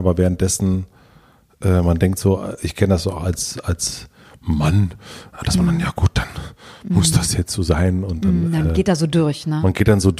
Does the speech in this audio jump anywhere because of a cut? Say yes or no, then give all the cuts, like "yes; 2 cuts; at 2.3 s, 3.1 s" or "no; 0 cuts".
no; 0 cuts